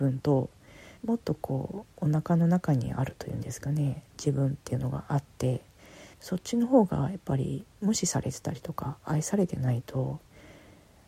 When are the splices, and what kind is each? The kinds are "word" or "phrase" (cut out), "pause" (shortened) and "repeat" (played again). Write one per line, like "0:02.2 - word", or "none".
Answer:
0:01.0 - pause
0:04.1 - pause
0:06.1 - pause